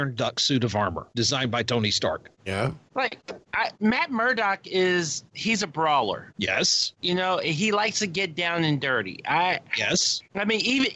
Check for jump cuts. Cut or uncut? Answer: uncut